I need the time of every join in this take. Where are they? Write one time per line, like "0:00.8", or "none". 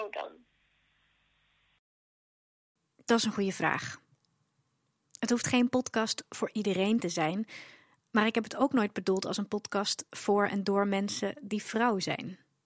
none